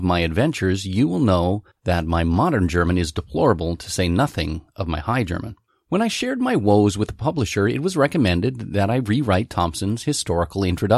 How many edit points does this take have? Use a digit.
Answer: 0